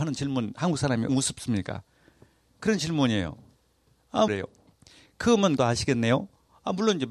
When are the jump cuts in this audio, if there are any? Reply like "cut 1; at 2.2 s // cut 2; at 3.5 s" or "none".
cut 1; at 1.1 s // cut 2; at 4.3 s // cut 3; at 5.6 s